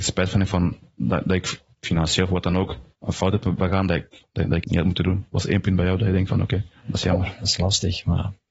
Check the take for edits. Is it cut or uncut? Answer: cut